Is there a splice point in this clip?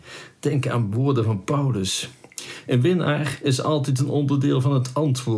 no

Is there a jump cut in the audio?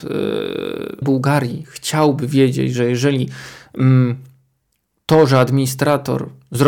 yes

